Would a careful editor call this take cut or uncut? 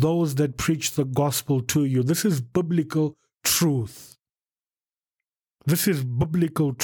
uncut